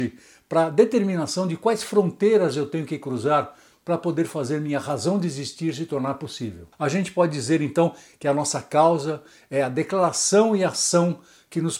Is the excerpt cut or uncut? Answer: uncut